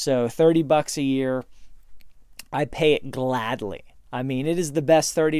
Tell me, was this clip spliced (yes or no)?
no